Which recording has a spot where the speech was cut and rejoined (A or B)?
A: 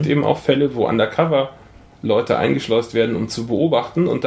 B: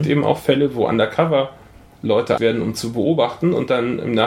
B